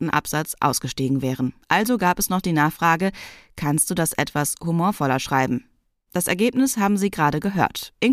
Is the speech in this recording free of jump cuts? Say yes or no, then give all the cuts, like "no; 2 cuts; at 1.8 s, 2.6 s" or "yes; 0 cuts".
no; 1 cut; at 1.6 s